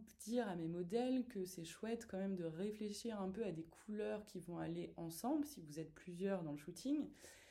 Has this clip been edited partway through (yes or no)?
no